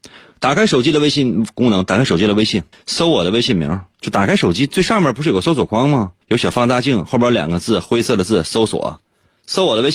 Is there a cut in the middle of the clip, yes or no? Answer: yes